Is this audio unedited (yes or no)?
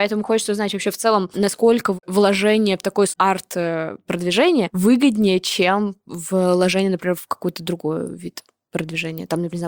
no